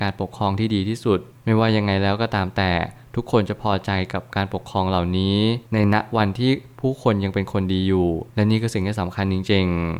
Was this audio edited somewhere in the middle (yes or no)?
yes